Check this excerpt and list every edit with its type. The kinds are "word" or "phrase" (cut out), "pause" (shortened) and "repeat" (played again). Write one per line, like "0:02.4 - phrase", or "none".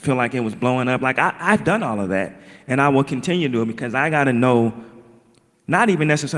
none